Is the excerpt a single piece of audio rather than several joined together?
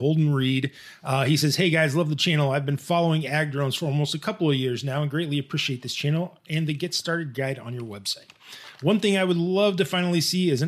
yes; 0 cuts

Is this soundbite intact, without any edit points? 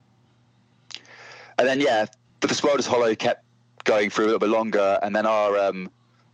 yes; 0 cuts

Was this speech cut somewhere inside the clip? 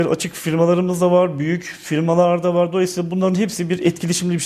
no; 0 cuts

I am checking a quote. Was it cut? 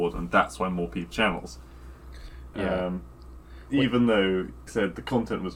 yes; 2 cuts; at 1.1 s, 4.7 s

